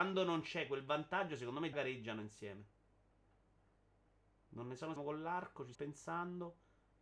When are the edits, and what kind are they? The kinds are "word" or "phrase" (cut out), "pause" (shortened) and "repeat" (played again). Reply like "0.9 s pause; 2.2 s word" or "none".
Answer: 1.7 s word; 5.0 s word; 5.7 s word

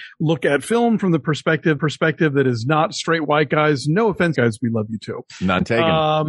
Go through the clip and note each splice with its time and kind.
1.8 s repeat; 4.3 s phrase

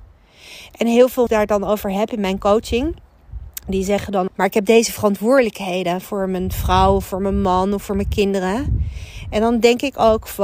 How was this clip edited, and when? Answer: 1.3 s phrase; 4.3 s phrase

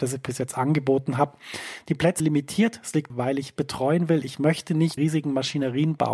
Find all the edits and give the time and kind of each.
2.2 s word; 3.1 s word; 3.6 s word; 5.0 s word

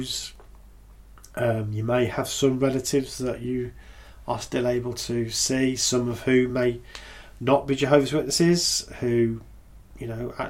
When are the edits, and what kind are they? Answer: none

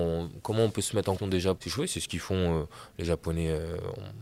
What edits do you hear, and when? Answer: 1.2 s word; 1.6 s word

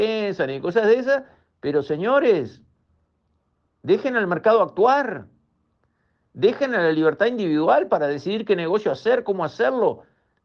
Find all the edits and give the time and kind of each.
none

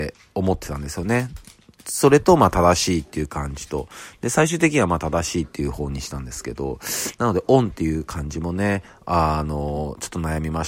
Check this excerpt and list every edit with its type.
none

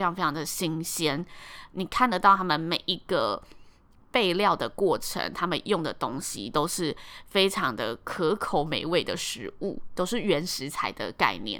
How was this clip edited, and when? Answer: none

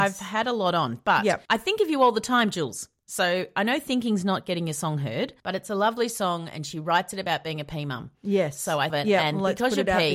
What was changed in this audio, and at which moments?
1.5 s pause; 5.4 s pause; 8.9 s phrase

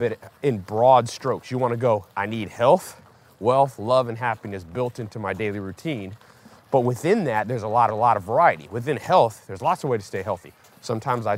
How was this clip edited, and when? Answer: 2.1 s pause; 7.9 s repeat

